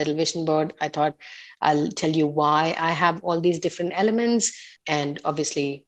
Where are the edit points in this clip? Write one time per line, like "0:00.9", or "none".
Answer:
0:04.8